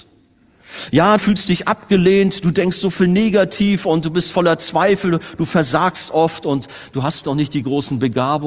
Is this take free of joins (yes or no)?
no